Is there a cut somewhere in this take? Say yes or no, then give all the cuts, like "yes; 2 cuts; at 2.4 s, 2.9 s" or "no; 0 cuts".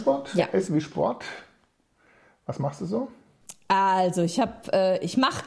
no; 0 cuts